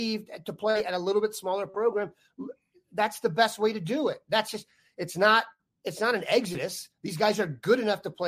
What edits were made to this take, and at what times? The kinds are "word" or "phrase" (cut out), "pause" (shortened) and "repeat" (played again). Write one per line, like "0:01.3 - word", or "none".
none